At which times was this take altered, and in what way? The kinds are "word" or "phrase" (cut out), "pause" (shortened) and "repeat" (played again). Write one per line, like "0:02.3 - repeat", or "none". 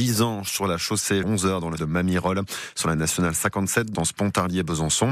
0:01.2 - word
0:01.8 - word
0:04.0 - word